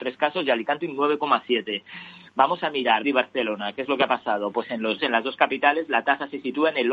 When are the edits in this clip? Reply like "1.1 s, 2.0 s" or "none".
3.0 s, 5.0 s